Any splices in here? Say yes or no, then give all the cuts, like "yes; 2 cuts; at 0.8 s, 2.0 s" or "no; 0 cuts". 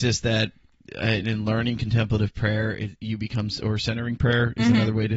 no; 0 cuts